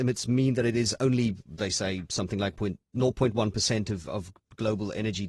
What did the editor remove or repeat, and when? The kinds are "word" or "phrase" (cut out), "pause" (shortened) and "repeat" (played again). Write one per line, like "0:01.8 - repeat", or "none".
0:02.5 - word
0:04.1 - word